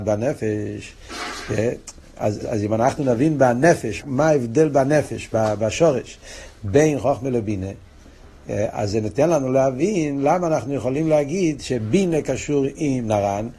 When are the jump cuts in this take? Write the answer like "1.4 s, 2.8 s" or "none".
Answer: 2.4 s, 4.0 s

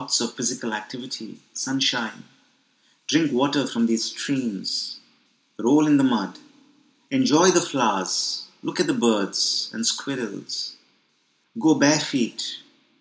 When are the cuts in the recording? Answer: none

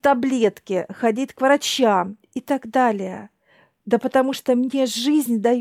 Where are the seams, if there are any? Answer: none

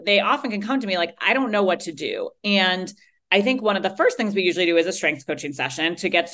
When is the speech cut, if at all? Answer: none

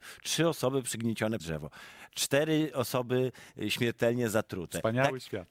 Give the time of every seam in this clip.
1.4 s

